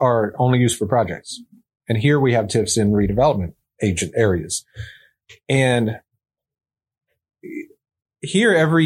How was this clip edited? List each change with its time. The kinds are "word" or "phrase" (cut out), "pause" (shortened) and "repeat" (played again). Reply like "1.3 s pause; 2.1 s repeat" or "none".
none